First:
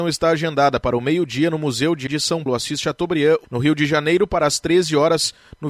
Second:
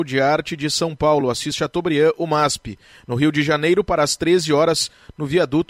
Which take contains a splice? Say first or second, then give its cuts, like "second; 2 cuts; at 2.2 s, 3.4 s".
first; 3 cuts; at 2.1 s, 2.5 s, 3.4 s